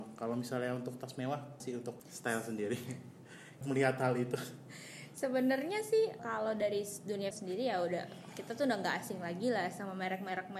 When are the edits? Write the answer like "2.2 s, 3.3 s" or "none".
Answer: 1.6 s, 3.6 s, 6.2 s, 7.3 s